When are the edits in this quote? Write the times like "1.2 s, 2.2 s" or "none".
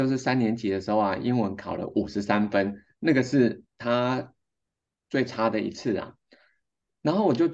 3.7 s